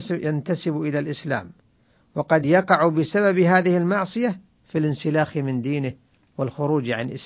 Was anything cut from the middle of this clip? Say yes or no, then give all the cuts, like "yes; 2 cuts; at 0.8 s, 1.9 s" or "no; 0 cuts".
no; 0 cuts